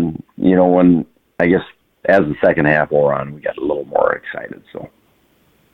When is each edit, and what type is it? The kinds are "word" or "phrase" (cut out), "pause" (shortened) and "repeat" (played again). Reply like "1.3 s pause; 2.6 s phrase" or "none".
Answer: none

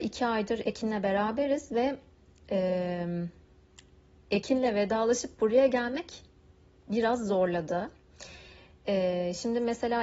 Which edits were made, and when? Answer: none

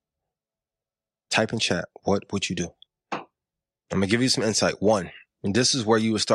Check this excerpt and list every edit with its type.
2.9 s pause

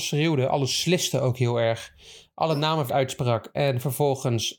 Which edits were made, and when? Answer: 2.9 s word

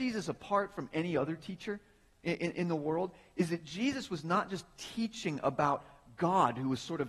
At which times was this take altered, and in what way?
none

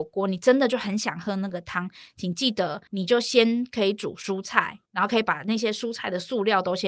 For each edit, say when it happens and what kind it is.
2.9 s pause; 4.9 s pause

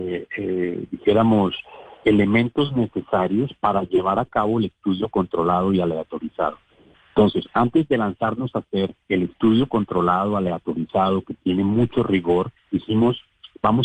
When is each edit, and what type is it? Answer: 9.0 s pause; 12.6 s pause

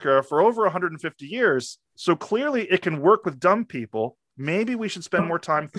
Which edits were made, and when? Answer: 1.9 s pause

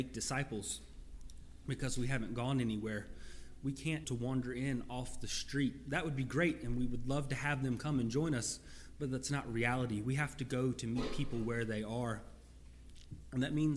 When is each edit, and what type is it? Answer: 4.0 s phrase

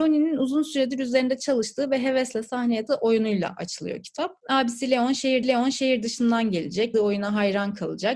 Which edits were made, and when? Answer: 2.9 s phrase; 4.4 s pause; 5.4 s repeat; 6.9 s word

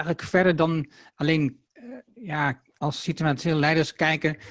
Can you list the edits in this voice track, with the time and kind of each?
1.7 s pause

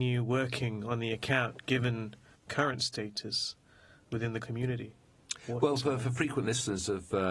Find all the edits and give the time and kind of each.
2.3 s word; 4.4 s word

